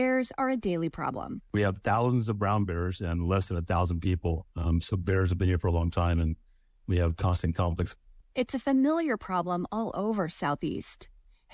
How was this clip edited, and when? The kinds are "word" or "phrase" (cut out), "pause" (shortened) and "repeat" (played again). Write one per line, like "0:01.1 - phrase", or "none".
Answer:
none